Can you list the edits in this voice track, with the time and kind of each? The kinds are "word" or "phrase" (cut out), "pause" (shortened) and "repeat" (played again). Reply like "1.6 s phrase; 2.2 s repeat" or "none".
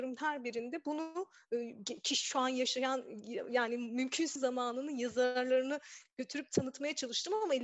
4.4 s word